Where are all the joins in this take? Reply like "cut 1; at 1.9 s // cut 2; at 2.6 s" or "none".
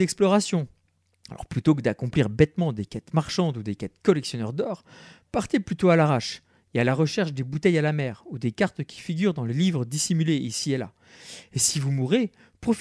none